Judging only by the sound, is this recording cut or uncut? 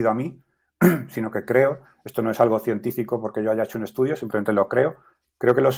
uncut